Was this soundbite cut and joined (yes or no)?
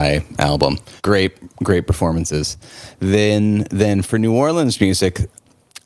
yes